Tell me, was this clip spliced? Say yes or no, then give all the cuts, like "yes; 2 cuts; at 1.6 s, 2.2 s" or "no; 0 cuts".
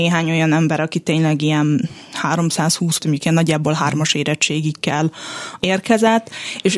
yes; 2 cuts; at 3.0 s, 5.6 s